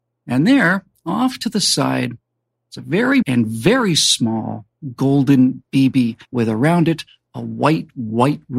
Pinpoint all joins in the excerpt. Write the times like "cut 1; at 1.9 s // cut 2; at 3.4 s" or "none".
cut 1; at 3.2 s // cut 2; at 6.2 s